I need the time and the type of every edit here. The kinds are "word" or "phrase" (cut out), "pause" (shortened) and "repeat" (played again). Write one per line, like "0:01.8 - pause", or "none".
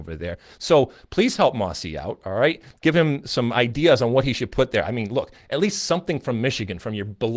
none